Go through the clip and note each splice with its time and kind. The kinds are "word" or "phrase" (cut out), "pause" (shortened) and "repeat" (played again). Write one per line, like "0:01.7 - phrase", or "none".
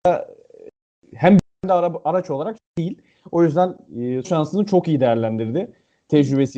0:01.5 - pause
0:02.6 - phrase
0:04.2 - word